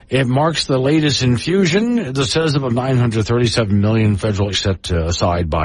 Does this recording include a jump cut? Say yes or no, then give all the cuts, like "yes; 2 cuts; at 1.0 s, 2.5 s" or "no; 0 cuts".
yes; 3 cuts; at 2.3 s, 2.7 s, 4.5 s